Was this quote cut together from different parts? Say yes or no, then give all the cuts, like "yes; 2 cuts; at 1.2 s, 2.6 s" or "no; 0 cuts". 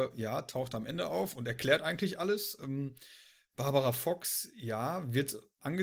no; 0 cuts